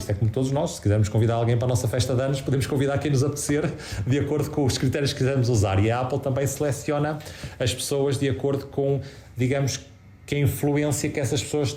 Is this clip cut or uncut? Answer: uncut